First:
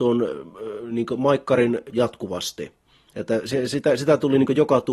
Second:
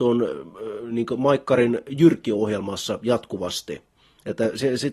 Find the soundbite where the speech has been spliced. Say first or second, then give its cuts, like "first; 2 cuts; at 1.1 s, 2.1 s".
first; 1 cut; at 1.9 s